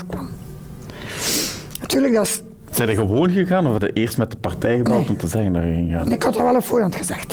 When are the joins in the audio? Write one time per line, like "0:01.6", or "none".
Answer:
none